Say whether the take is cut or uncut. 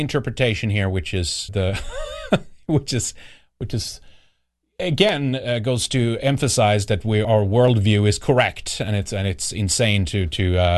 cut